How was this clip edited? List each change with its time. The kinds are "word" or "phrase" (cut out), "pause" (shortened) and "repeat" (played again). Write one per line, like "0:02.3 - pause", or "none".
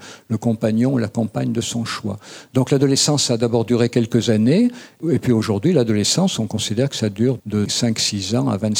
0:07.4 - word